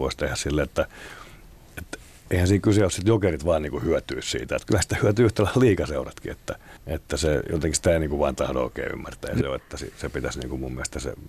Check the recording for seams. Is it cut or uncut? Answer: cut